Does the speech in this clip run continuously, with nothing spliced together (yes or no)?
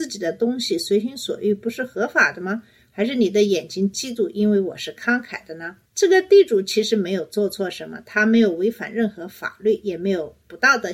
no